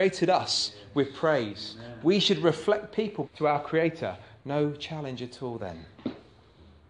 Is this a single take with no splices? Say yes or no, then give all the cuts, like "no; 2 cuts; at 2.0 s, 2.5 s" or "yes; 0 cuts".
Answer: no; 1 cut; at 3.3 s